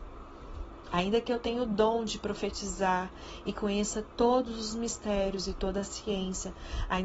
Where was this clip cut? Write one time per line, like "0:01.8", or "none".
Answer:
none